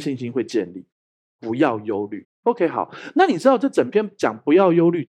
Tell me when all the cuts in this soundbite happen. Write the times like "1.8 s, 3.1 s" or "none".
none